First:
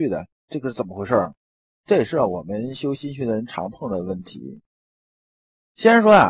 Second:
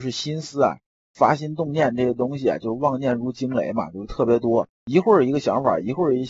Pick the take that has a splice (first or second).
second